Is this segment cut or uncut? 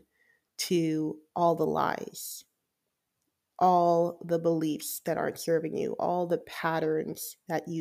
uncut